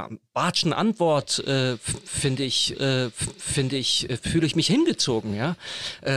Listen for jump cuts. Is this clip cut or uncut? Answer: cut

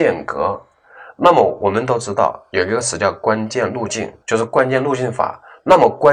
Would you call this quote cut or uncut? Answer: cut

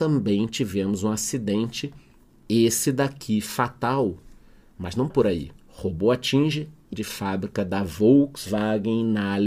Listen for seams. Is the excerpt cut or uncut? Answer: cut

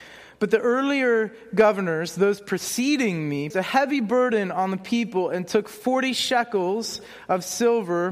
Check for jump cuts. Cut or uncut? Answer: cut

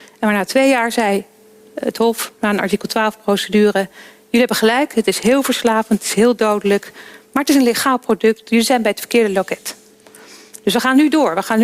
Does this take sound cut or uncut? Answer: uncut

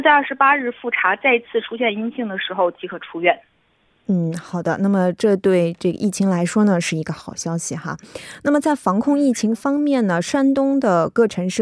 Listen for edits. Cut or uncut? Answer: uncut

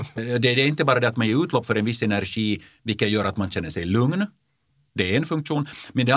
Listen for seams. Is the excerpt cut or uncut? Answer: uncut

